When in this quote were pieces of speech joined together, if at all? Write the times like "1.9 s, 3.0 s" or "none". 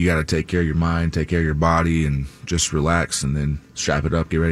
none

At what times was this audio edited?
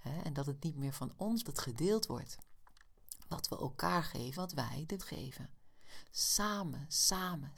1.4 s, 4.3 s, 5.0 s

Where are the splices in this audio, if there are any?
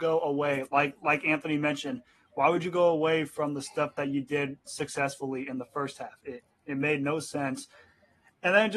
none

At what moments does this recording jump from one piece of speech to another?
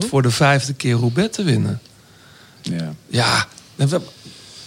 none

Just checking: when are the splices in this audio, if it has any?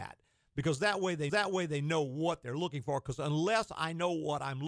1.3 s

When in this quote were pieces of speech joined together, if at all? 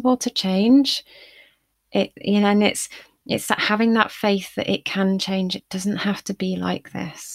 none

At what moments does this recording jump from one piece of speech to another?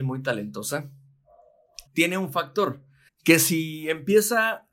1.9 s, 3.1 s

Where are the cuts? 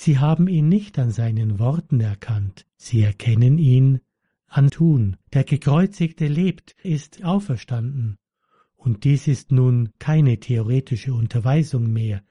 2.7 s, 4.7 s, 5.2 s, 6.8 s, 7.2 s

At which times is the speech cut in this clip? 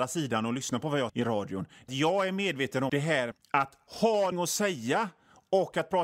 1.1 s, 1.9 s, 2.9 s, 3.3 s, 4.3 s

